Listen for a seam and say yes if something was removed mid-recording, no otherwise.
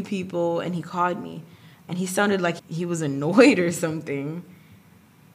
yes